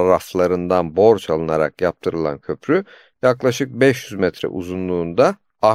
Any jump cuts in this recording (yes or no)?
no